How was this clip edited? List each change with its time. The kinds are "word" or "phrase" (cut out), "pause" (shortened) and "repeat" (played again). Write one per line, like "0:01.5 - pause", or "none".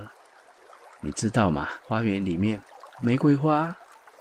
0:01.8 - pause